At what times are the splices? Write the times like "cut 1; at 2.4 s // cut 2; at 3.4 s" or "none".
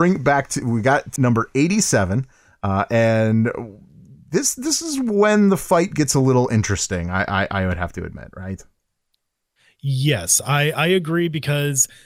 cut 1; at 1.2 s